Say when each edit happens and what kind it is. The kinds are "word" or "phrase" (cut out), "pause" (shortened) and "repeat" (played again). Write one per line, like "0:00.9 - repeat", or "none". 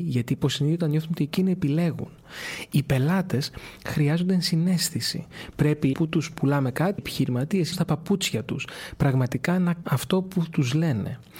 0:01.2 - phrase
0:05.9 - word
0:07.0 - word
0:07.7 - phrase
0:09.8 - word